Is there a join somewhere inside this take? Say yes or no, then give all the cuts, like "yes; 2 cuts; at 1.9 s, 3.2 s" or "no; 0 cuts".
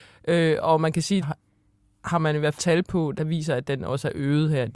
yes; 3 cuts; at 1.2 s, 2.6 s, 3.2 s